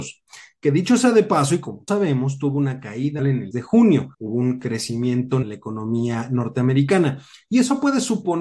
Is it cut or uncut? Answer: cut